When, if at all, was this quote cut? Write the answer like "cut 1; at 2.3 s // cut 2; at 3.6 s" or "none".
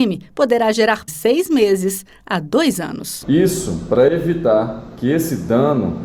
cut 1; at 1.1 s